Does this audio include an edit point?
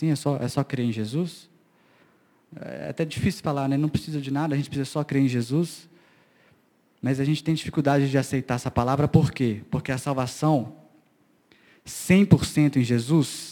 no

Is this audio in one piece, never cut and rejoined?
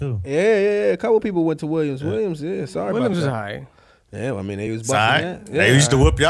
yes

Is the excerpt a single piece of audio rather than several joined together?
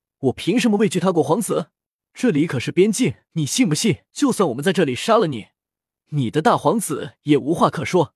no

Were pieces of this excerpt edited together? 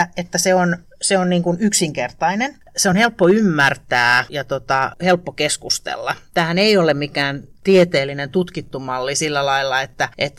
no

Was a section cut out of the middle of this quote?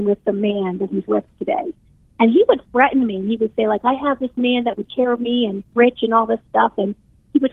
yes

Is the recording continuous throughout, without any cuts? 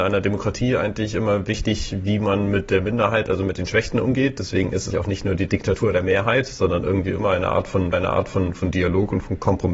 no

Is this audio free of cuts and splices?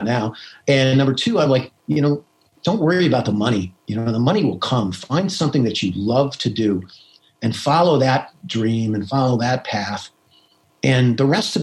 yes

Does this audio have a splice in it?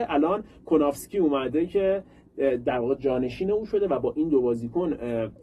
no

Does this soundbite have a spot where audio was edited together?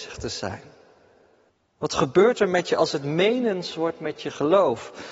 yes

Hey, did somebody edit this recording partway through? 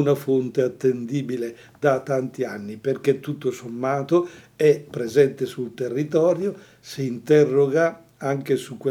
no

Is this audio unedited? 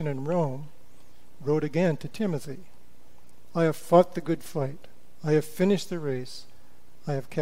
yes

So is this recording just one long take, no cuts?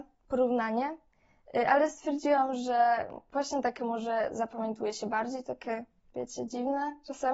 yes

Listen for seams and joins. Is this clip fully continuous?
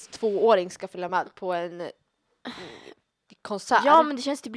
yes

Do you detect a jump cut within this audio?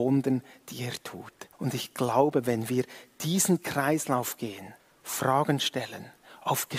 yes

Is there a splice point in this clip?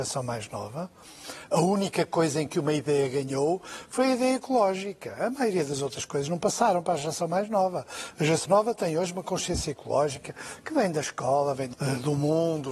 yes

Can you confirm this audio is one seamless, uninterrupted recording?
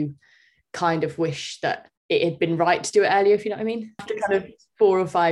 no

